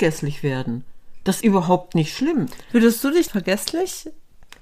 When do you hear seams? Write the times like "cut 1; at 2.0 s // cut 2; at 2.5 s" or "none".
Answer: cut 1; at 1.4 s // cut 2; at 3.3 s